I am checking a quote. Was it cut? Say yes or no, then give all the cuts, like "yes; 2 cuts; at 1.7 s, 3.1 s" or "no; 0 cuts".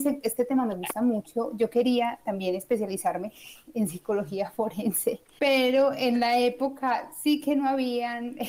no; 0 cuts